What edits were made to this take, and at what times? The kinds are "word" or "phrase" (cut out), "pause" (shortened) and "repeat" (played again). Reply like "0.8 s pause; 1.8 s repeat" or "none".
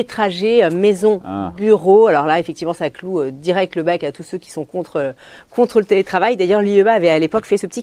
none